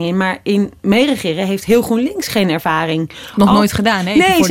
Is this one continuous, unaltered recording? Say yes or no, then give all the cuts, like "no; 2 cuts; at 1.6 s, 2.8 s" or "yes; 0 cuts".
yes; 0 cuts